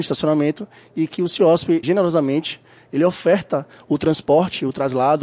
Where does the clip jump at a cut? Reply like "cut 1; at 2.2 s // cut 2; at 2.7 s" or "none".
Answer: cut 1; at 1.8 s